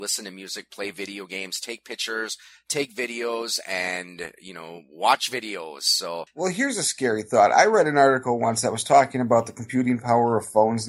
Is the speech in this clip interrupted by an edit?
yes; 1 cut; at 6.3 s

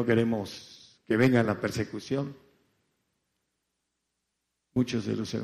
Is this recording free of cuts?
yes; 0 cuts

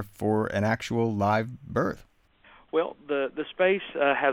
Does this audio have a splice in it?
no; 0 cuts

